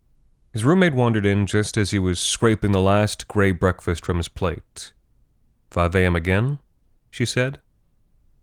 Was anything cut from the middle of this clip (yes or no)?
no